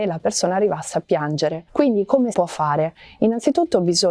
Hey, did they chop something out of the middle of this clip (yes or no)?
yes